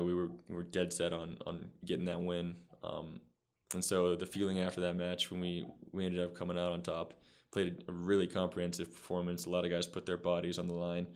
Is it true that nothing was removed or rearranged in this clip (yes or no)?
yes